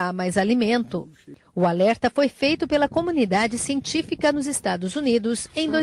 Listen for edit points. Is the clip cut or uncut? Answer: uncut